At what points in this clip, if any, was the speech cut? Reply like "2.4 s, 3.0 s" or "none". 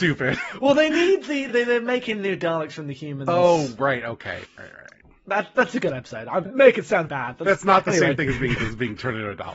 1.5 s, 4.4 s, 6.5 s, 7.1 s, 8.6 s